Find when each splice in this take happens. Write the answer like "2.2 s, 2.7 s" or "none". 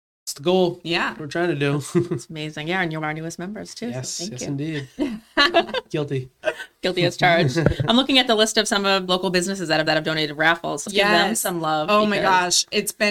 3.0 s, 9.1 s, 9.9 s, 10.9 s

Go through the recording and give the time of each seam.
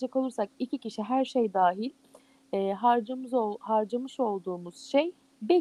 none

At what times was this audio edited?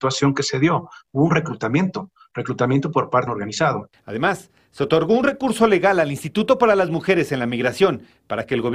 3.3 s

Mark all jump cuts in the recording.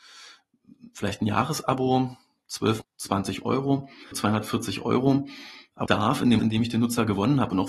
2.8 s, 4.1 s, 5.9 s, 6.4 s

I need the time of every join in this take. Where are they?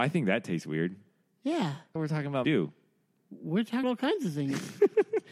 2.0 s, 2.4 s, 3.8 s

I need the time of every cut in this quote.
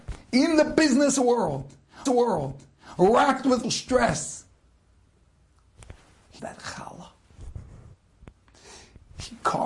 2.1 s, 3.6 s, 6.4 s

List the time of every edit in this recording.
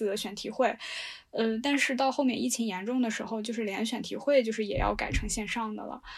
none

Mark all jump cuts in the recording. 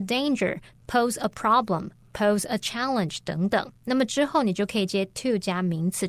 none

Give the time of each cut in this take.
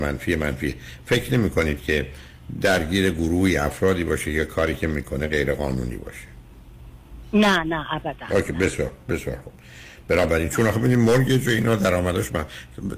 none

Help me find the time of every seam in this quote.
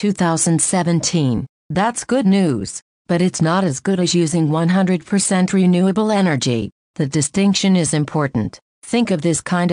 none

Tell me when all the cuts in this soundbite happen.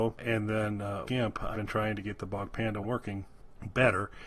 1.0 s, 1.5 s, 2.8 s

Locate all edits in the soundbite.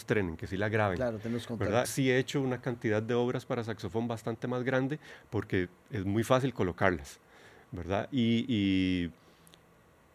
1.8 s

